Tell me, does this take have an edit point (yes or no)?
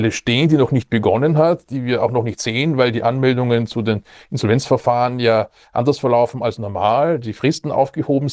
no